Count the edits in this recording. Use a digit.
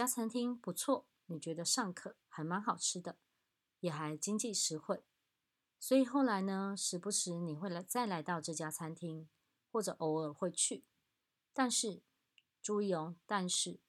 1